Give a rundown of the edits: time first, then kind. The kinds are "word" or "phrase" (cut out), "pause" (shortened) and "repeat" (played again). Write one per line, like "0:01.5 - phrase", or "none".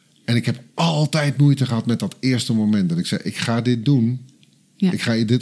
none